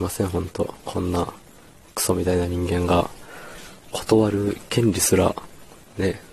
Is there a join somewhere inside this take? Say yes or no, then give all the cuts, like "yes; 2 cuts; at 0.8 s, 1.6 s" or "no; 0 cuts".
no; 0 cuts